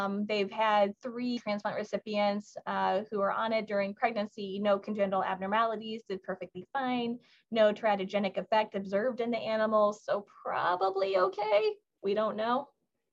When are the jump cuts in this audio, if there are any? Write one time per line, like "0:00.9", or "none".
0:01.4